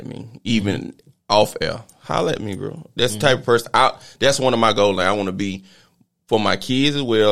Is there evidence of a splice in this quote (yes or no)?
no